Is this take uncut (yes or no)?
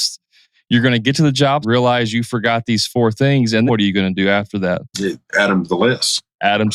no